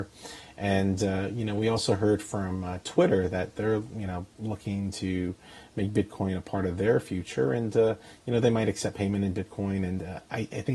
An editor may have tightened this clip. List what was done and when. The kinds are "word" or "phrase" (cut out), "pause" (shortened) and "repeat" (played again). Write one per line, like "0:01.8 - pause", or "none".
0:04.3 - pause